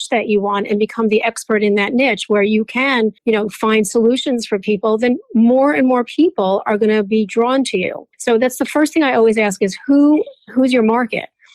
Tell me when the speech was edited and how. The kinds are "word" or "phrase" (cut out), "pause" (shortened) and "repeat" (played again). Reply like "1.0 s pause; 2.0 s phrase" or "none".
3.2 s pause; 8.1 s pause